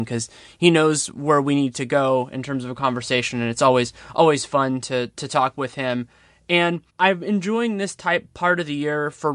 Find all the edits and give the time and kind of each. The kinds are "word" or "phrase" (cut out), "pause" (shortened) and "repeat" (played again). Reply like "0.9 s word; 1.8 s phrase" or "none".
6.9 s pause